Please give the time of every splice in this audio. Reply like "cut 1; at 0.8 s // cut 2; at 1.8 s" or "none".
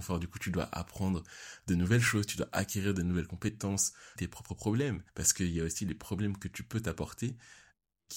cut 1; at 4.2 s // cut 2; at 5.1 s

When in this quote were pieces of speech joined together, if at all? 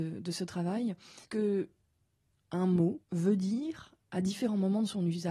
cut 1; at 1.2 s // cut 2; at 3.0 s

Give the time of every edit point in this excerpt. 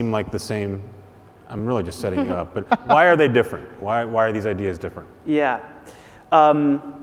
none

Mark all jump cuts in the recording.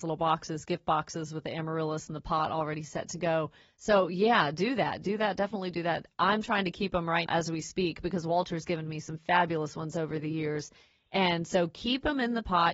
cut 1; at 7.3 s

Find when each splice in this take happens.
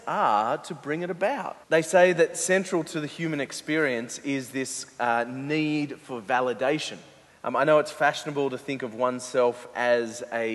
cut 1; at 1.6 s // cut 2; at 7.3 s

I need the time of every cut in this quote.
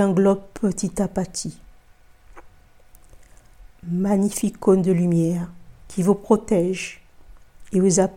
cut 1; at 3.7 s // cut 2; at 5.8 s

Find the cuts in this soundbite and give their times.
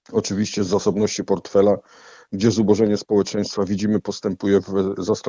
none

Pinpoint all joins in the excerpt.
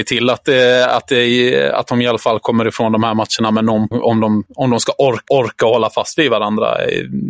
cut 1; at 3.9 s // cut 2; at 4.5 s // cut 3; at 5.3 s

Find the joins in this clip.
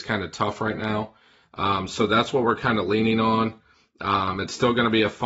none

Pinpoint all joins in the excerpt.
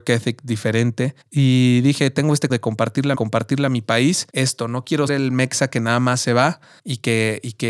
cut 1; at 1.2 s // cut 2; at 2.5 s // cut 3; at 3.1 s // cut 4; at 4.3 s // cut 5; at 5.1 s // cut 6; at 6.8 s

